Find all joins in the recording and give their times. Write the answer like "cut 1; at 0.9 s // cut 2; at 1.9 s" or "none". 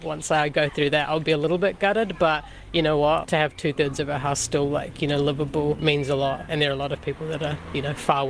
none